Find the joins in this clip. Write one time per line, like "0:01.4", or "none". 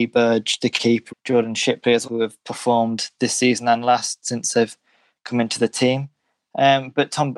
0:01.1
0:02.0

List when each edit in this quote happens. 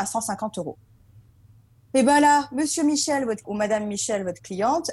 0:03.4

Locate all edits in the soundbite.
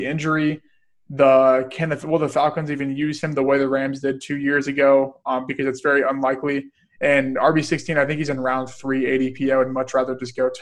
none

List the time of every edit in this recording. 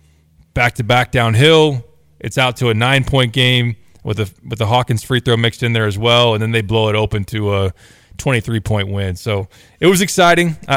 none

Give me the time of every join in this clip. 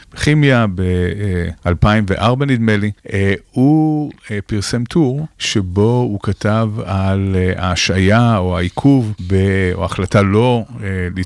0:01.6
0:03.0
0:05.3
0:09.2

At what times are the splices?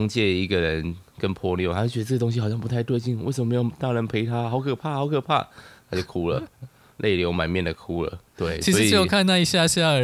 0:08.3

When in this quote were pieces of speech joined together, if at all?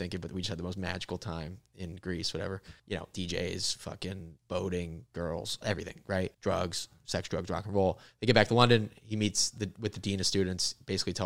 0:02.8
0:04.4
0:06.3

